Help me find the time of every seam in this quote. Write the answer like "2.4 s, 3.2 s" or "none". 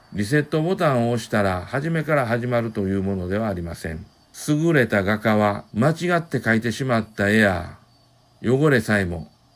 4.2 s

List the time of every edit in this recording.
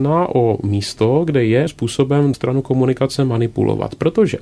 1.7 s, 2.3 s

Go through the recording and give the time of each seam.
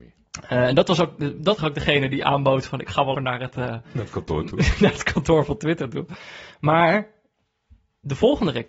1.6 s, 3.1 s

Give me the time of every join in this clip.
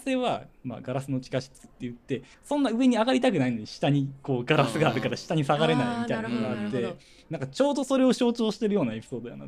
2.3 s

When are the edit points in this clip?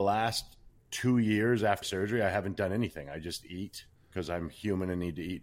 1.8 s, 3.9 s

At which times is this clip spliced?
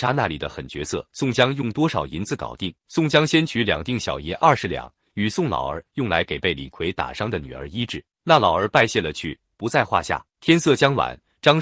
1.1 s, 2.8 s, 8.1 s, 10.3 s

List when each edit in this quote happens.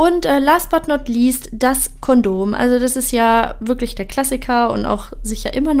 none

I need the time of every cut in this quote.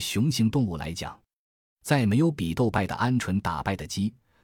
none

